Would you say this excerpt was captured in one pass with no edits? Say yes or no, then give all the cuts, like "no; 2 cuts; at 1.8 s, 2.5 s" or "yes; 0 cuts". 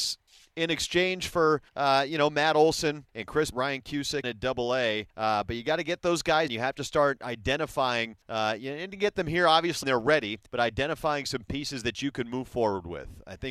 no; 9 cuts; at 1.7 s, 3.1 s, 3.5 s, 4.2 s, 5.1 s, 6.5 s, 8.2 s, 9.8 s, 10.5 s